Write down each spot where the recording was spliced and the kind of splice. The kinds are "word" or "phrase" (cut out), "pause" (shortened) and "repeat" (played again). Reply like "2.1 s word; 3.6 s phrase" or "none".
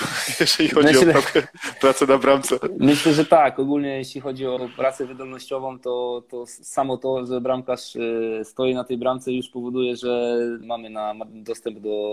4.6 s word; 10.6 s phrase

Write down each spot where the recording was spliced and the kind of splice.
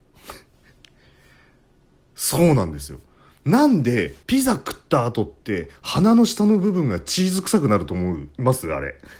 4.2 s pause

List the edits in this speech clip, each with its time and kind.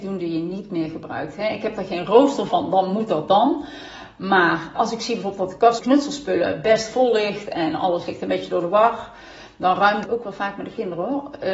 2.5 s word; 4.8 s word; 5.8 s word; 10.0 s word

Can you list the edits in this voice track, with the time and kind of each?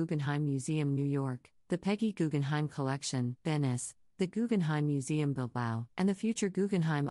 3.4 s pause; 5.9 s pause

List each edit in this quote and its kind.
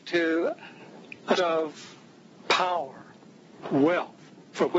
1.4 s word

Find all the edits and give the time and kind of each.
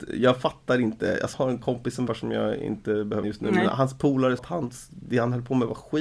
1.3 s word; 2.1 s word; 3.2 s word; 4.4 s word

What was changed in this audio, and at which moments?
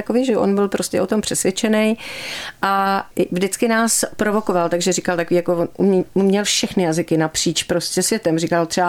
none

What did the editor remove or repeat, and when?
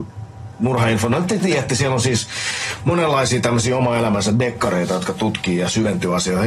none

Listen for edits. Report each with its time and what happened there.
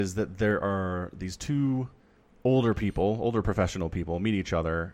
none

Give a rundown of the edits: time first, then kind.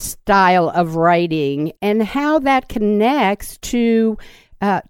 1.8 s word

